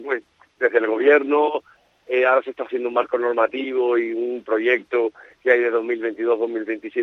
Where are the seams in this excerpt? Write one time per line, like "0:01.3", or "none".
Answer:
none